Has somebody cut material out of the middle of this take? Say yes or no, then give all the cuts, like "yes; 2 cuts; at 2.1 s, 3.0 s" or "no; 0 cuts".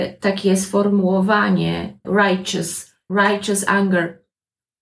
yes; 2 cuts; at 2.0 s, 3.1 s